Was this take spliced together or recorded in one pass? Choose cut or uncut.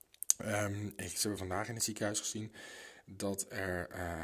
uncut